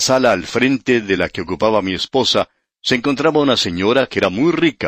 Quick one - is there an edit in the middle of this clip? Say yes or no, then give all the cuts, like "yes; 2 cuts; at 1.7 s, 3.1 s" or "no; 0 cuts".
no; 0 cuts